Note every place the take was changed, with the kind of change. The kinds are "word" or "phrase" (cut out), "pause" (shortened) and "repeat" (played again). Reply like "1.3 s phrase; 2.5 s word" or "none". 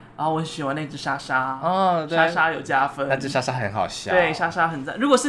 none

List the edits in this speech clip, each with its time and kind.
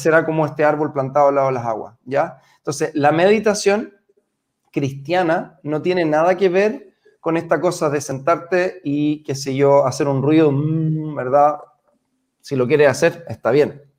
none

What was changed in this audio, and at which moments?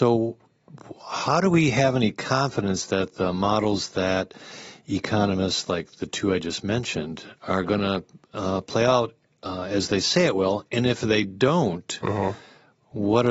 none

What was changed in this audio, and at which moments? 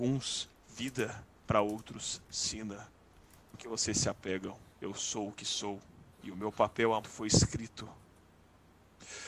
3.5 s phrase; 4.7 s pause; 6.1 s pause; 7.0 s word

